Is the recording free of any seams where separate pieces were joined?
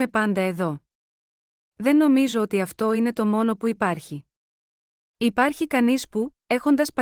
yes; 0 cuts

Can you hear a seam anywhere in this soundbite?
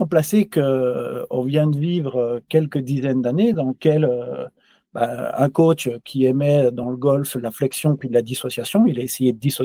no; 0 cuts

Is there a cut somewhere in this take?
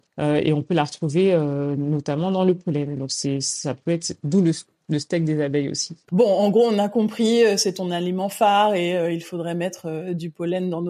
no; 0 cuts

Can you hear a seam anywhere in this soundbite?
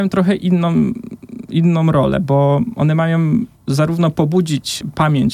yes; 1 cut; at 3.6 s

